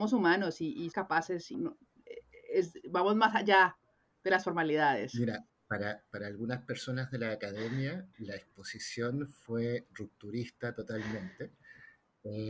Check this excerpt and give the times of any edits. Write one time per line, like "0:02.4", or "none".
0:00.9
0:01.5
0:05.5
0:08.1